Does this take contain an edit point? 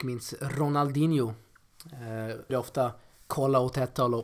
yes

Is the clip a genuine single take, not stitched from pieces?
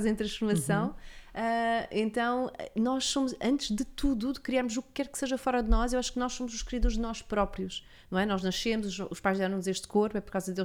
yes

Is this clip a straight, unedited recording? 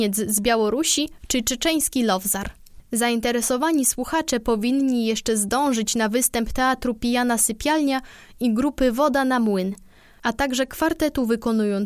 yes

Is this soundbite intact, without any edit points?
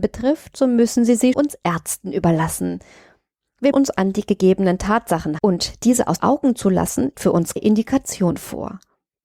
no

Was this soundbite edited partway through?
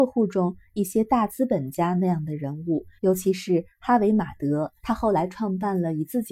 yes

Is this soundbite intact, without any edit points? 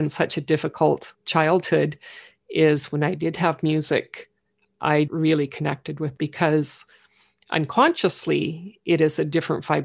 no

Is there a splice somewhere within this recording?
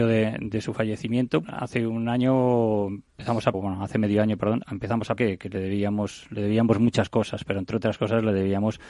yes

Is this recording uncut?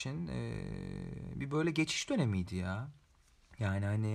yes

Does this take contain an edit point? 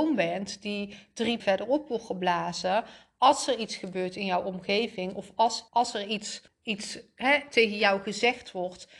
yes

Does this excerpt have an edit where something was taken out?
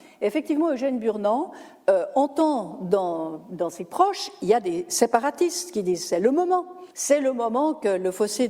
yes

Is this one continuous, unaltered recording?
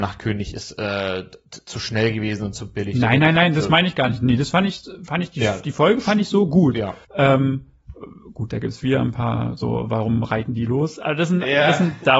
no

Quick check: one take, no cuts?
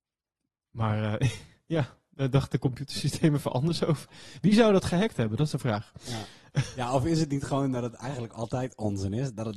yes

